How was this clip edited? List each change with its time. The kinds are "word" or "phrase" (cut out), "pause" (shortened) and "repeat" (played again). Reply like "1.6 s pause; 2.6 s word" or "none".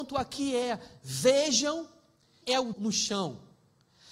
2.4 s word; 2.7 s phrase